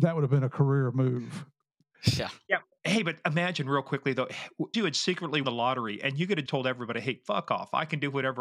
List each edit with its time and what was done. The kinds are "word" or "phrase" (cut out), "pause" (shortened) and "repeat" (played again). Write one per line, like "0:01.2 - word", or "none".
0:04.7 - phrase
0:05.4 - word
0:06.5 - word